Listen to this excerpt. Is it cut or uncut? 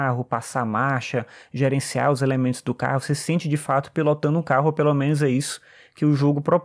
uncut